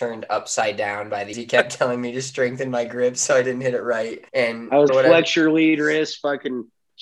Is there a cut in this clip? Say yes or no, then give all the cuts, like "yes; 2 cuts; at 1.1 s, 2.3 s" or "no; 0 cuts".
yes; 3 cuts; at 1.3 s, 4.3 s, 4.9 s